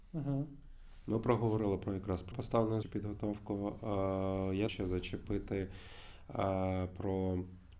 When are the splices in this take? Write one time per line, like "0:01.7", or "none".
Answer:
0:02.3
0:02.8
0:04.7